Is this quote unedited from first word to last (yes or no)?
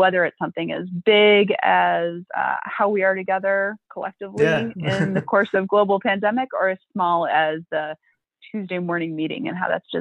yes